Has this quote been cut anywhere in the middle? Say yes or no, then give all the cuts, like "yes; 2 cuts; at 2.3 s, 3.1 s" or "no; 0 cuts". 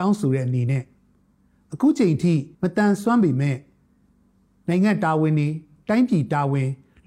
yes; 1 cut; at 2.5 s